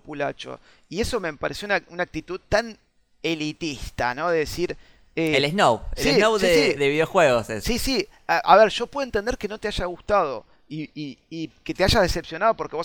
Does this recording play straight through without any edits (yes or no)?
yes